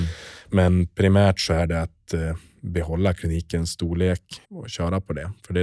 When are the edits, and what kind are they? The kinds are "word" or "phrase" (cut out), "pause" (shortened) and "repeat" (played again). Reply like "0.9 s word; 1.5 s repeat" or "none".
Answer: 4.4 s pause